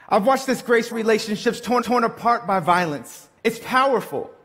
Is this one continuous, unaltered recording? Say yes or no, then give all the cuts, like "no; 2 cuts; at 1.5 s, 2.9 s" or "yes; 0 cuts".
no; 3 cuts; at 0.9 s, 1.8 s, 3.4 s